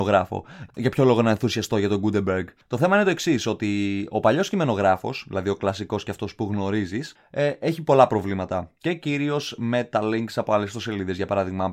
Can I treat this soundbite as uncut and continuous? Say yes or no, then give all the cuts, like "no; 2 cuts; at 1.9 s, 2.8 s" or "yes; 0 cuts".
yes; 0 cuts